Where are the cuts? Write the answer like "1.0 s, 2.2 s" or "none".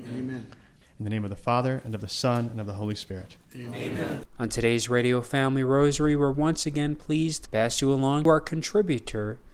none